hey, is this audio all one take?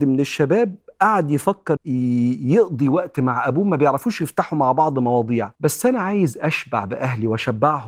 no; 2 cuts; at 1.8 s, 5.6 s

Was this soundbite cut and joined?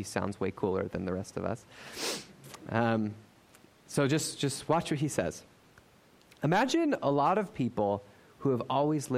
no; 0 cuts

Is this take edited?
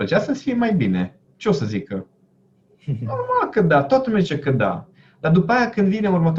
no; 0 cuts

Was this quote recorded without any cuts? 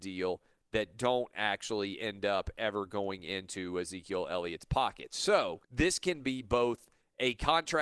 no; 1 cut; at 5.6 s

